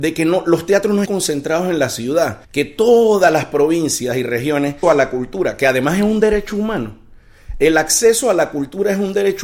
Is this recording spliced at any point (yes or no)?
yes